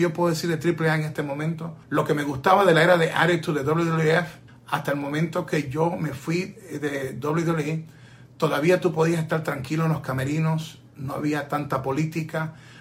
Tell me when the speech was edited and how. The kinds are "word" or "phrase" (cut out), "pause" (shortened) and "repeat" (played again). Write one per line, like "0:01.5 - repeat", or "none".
0:01.8 - pause
0:04.5 - pause